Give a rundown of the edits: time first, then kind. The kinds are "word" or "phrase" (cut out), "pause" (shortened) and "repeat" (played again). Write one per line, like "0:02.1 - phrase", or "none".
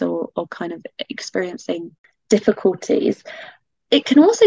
none